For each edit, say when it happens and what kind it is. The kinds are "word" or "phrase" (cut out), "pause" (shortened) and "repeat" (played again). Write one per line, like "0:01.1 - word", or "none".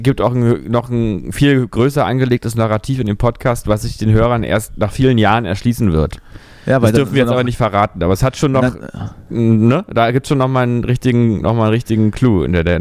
none